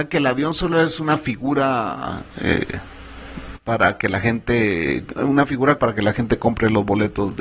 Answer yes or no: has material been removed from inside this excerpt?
yes